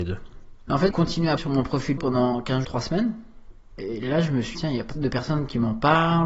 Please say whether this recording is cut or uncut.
cut